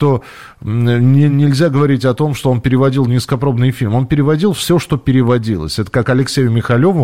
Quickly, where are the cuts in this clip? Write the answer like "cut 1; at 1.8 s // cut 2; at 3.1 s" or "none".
none